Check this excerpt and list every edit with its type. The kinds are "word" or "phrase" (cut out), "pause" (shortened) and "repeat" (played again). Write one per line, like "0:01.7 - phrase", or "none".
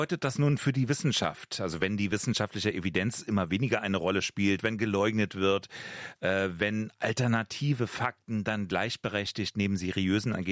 none